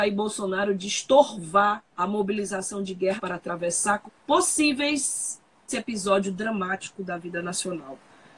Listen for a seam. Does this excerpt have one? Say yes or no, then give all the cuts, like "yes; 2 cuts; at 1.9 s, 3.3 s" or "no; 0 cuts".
yes; 4 cuts; at 1.9 s, 3.2 s, 4.1 s, 5.7 s